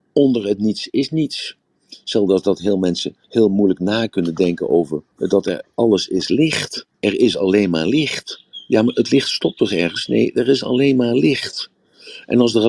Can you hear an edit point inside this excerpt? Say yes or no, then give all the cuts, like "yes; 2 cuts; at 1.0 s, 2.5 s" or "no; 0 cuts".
yes; 3 cuts; at 3.2 s, 5.1 s, 6.9 s